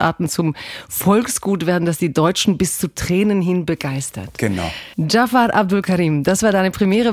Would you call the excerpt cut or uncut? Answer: cut